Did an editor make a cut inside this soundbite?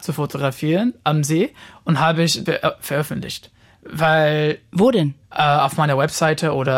yes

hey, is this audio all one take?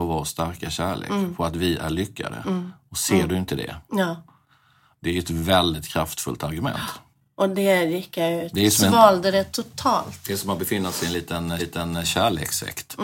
no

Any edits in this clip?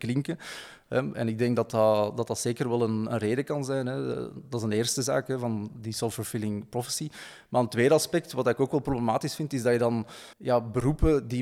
yes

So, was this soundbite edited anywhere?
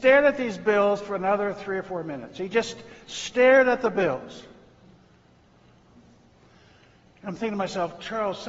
no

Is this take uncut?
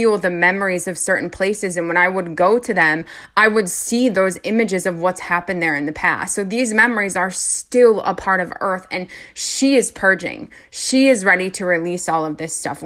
yes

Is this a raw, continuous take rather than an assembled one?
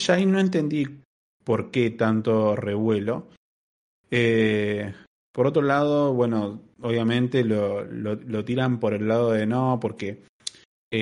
yes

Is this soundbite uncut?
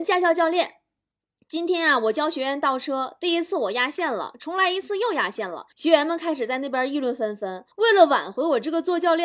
no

